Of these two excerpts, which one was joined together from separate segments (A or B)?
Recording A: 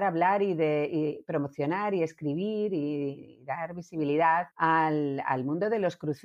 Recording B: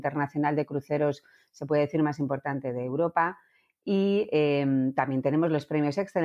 A